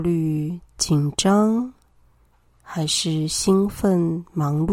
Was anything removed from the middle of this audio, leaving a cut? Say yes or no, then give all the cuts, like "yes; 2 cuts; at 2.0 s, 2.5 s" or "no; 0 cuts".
no; 0 cuts